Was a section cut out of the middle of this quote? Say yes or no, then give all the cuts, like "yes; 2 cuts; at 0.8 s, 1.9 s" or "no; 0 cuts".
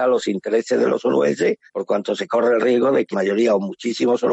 yes; 2 cuts; at 1.7 s, 3.1 s